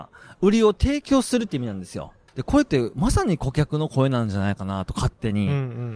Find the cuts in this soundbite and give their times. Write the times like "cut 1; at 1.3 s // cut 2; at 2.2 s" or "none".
cut 1; at 2.3 s